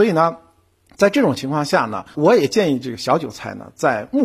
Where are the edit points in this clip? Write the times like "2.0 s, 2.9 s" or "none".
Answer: 2.1 s